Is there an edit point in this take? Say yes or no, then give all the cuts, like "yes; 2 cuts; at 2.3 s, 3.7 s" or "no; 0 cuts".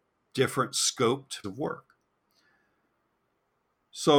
yes; 1 cut; at 1.4 s